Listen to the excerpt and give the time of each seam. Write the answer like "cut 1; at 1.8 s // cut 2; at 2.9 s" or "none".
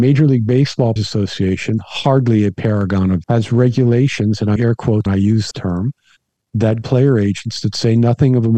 cut 1; at 1.0 s // cut 2; at 3.2 s // cut 3; at 4.6 s // cut 4; at 5.1 s // cut 5; at 5.5 s // cut 6; at 6.8 s